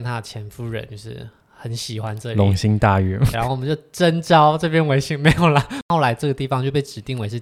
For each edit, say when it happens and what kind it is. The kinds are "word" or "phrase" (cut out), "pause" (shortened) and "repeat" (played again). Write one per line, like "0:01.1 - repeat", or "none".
0:03.3 - word